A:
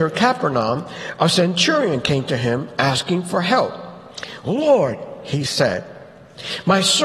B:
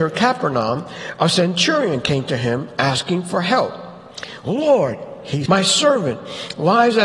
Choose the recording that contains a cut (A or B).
B